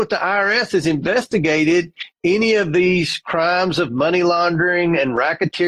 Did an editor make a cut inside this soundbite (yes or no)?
no